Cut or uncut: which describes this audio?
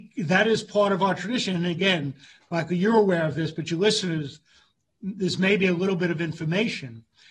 uncut